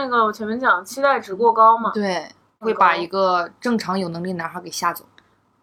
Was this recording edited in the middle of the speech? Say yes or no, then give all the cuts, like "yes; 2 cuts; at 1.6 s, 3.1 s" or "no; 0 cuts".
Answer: no; 0 cuts